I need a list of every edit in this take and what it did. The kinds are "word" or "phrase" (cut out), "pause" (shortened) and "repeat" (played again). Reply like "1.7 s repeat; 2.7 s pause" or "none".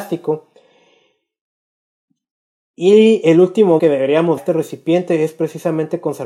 3.8 s word; 4.4 s phrase